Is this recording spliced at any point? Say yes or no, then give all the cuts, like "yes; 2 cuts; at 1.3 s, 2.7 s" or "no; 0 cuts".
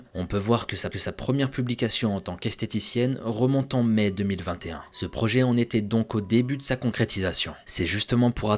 yes; 1 cut; at 0.9 s